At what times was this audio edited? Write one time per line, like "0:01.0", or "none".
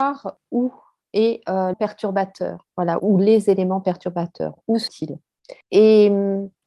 0:01.7
0:03.0
0:04.9
0:05.6